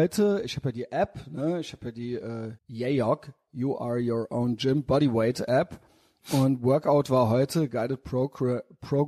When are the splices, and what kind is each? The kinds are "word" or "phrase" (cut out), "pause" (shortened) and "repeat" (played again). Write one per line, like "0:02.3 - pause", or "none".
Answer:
0:02.6 - pause